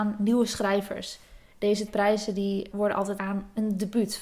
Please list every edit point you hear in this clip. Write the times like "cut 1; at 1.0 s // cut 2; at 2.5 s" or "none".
cut 1; at 1.9 s // cut 2; at 2.7 s // cut 3; at 3.2 s